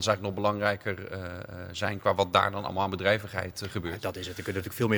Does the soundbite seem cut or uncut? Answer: uncut